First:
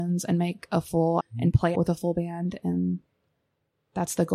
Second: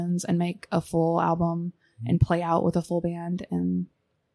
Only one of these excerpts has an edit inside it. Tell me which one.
first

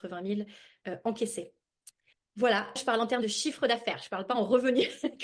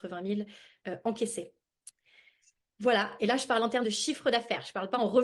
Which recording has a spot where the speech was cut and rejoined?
first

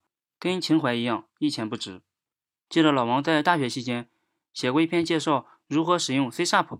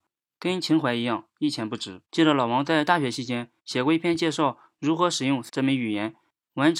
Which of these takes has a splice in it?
second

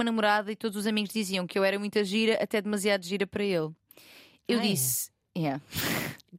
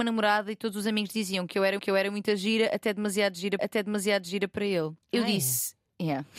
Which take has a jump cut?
second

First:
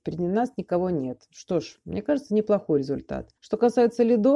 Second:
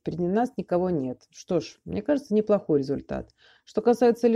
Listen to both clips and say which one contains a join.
first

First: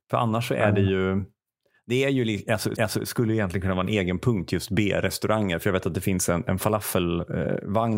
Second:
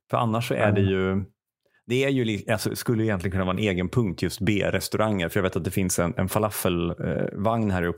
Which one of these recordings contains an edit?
first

